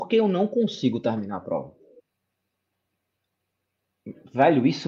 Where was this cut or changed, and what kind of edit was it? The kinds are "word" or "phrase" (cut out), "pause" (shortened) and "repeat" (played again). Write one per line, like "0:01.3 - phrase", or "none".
none